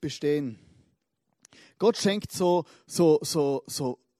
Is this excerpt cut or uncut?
uncut